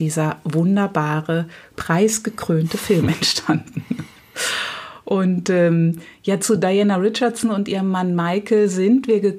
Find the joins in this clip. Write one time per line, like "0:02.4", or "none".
none